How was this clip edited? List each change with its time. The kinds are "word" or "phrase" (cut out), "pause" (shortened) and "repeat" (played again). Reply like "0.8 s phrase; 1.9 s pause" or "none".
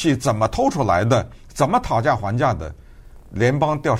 1.4 s pause